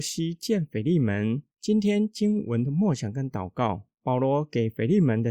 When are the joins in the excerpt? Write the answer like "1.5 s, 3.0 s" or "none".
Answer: 1.5 s, 3.9 s

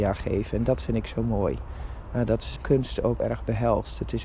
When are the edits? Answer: 2.6 s, 3.2 s

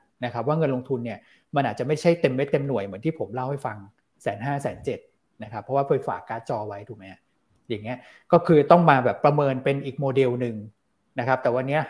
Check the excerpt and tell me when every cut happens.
none

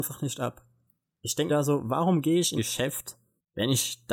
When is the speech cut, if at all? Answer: 1.5 s, 2.6 s

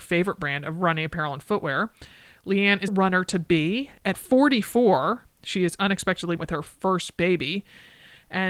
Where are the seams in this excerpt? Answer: 2.9 s, 4.1 s, 6.4 s

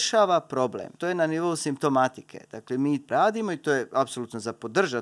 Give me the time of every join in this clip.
1.0 s, 3.1 s

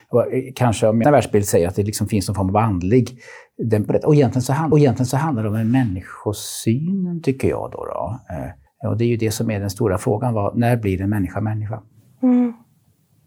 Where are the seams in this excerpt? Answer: 1.0 s, 3.9 s, 4.7 s, 8.7 s

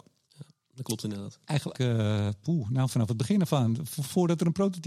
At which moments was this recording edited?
1.7 s

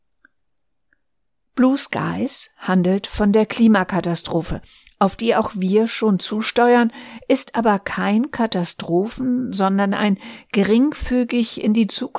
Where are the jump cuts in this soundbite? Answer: none

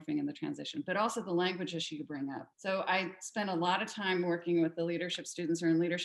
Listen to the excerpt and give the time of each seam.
2.5 s

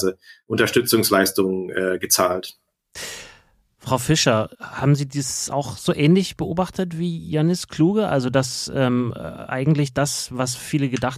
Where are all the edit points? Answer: none

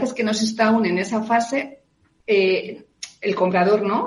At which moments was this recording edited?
none

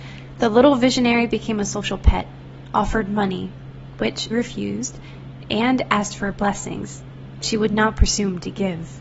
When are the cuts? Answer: 4.3 s, 7.4 s

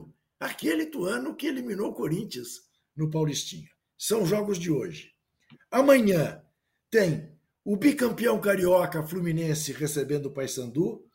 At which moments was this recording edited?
none

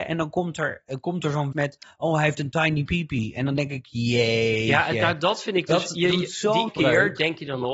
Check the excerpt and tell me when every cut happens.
1.5 s, 6.7 s

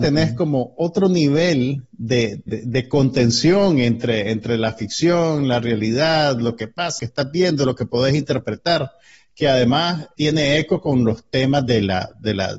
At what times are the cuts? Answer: 2.5 s, 7.0 s, 10.2 s

